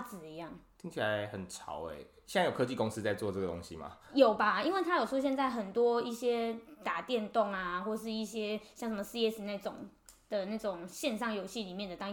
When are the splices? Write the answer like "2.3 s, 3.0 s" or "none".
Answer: none